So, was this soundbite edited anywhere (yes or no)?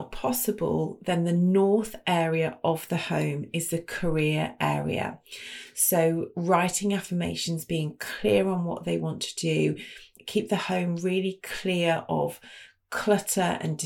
no